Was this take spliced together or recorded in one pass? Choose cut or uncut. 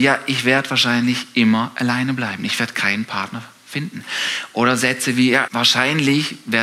cut